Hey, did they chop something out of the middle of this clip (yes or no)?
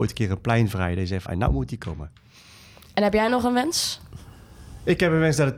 yes